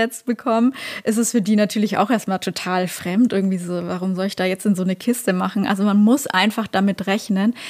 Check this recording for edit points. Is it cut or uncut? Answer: uncut